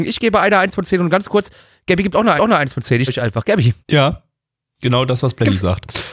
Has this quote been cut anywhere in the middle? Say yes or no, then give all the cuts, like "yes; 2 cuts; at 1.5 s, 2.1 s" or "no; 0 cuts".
yes; 3 cuts; at 2.4 s, 3.1 s, 3.8 s